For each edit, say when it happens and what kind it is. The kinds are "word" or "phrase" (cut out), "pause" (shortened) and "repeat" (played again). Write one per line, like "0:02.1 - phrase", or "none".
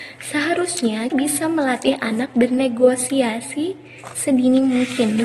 0:01.1 - word